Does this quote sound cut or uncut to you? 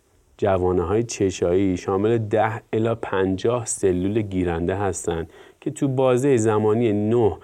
uncut